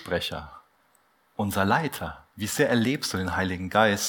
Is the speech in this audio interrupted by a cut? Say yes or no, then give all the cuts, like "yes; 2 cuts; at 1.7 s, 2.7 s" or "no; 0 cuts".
yes; 1 cut; at 2.3 s